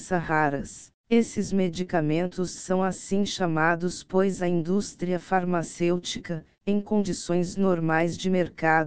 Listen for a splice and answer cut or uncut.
cut